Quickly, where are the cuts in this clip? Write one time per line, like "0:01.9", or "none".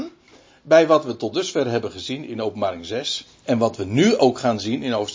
none